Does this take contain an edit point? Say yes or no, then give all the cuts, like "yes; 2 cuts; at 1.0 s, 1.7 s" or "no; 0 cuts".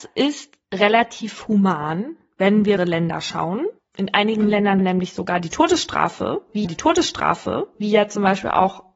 yes; 3 cuts; at 2.8 s, 4.8 s, 6.6 s